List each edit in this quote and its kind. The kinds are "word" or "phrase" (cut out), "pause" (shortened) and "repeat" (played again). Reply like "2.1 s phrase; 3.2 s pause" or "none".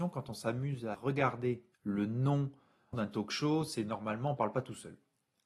0.9 s word; 1.7 s pause; 2.9 s phrase